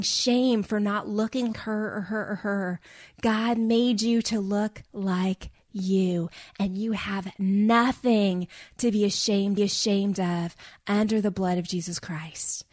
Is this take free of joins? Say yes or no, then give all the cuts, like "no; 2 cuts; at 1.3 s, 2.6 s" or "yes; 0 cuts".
no; 3 cuts; at 1.5 s, 4.9 s, 9.6 s